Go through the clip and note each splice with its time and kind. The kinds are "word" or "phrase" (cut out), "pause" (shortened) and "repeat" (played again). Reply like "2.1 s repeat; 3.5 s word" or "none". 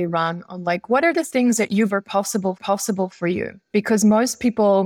1.9 s word; 2.6 s repeat